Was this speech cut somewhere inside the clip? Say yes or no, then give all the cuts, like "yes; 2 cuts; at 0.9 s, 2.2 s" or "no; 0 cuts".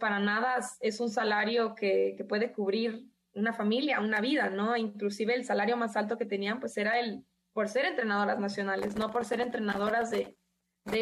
no; 0 cuts